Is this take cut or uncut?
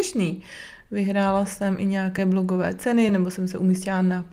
uncut